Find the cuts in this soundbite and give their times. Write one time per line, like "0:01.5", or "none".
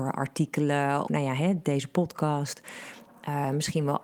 0:01.1